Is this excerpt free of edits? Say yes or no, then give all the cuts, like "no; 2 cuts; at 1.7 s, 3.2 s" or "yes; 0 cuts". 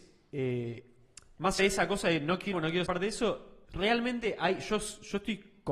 no; 4 cuts; at 1.6 s, 2.5 s, 2.9 s, 3.6 s